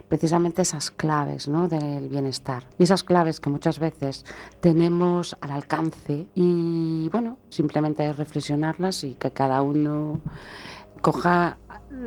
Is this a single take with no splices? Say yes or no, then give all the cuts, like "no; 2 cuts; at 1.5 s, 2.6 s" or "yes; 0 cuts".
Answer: no; 4 cuts; at 2.7 s, 6.3 s, 7.5 s, 11.0 s